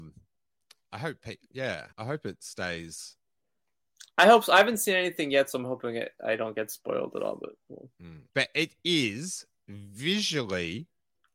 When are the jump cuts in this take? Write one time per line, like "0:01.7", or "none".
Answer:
0:01.9
0:08.3